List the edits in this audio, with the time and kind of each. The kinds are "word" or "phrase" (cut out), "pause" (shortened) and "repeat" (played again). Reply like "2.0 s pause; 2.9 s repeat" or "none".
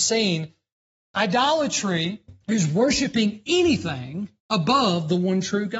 2.4 s pause; 4.4 s pause

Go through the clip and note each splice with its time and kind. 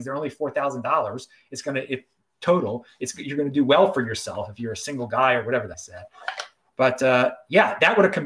5.7 s phrase

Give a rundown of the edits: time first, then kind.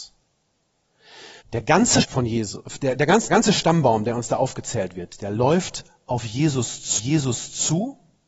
1.4 s pause; 2.0 s word; 3.3 s word; 7.0 s repeat

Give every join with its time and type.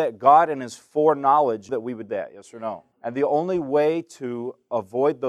1.7 s word; 2.1 s word; 2.9 s pause

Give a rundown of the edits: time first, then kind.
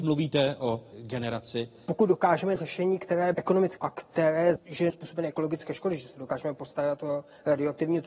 0.9 s word; 2.6 s word; 3.3 s word; 3.8 s word; 4.6 s word; 4.9 s word

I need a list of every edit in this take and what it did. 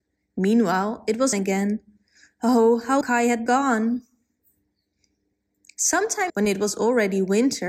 1.3 s word; 3.0 s word; 3.5 s word; 6.3 s word

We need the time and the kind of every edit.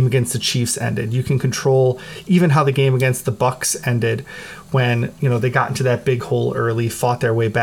none

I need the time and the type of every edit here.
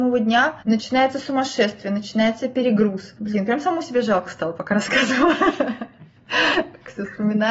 3.2 s pause

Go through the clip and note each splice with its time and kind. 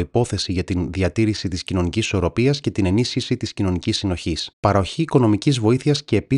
4.5 s pause

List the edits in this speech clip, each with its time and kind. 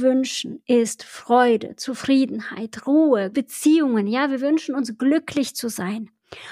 3.3 s word

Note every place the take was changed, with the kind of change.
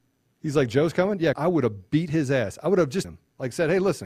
1.3 s word; 3.0 s word

